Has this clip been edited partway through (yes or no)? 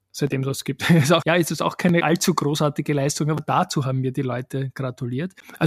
yes